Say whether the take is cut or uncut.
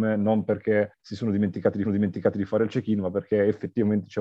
cut